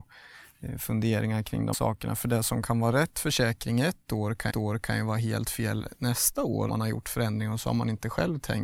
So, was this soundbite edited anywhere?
yes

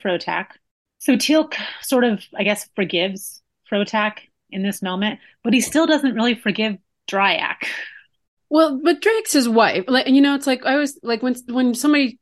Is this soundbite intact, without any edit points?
yes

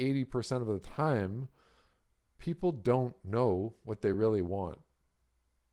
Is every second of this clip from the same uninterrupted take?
yes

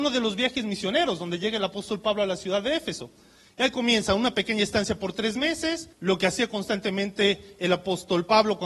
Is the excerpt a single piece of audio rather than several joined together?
no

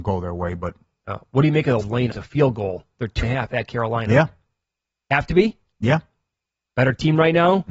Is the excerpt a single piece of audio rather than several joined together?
no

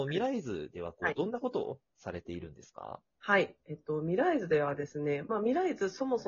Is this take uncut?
no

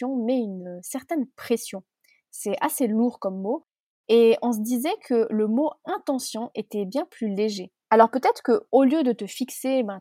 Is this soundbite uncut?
yes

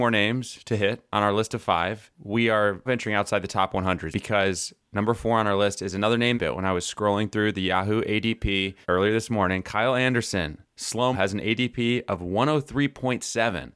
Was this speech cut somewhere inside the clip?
yes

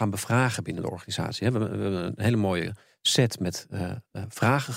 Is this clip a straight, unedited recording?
yes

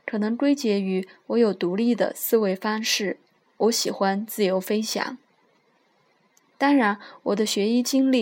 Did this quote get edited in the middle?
no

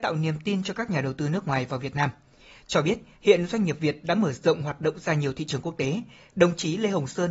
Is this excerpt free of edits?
yes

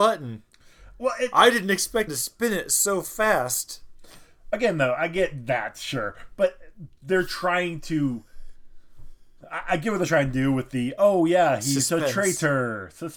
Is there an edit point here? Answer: yes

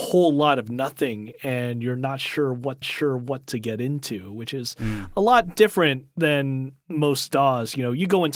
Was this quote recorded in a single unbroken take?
no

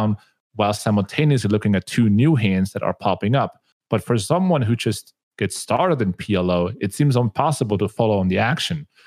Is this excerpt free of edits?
yes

